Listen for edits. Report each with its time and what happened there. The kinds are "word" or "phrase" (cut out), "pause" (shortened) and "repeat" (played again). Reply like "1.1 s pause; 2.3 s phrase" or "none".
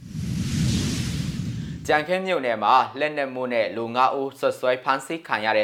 none